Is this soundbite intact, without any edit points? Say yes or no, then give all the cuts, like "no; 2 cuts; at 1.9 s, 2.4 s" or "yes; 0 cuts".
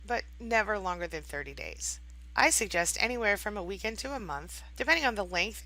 yes; 0 cuts